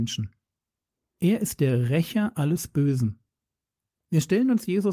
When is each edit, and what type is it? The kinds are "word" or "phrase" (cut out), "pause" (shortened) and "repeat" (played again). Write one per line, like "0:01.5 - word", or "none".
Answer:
none